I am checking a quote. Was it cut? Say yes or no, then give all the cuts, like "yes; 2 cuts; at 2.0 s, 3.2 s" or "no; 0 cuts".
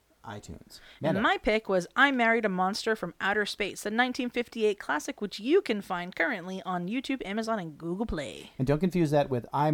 no; 0 cuts